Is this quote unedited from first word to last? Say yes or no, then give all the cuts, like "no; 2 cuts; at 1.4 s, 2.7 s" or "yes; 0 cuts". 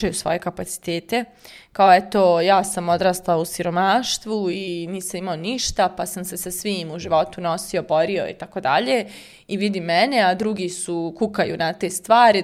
yes; 0 cuts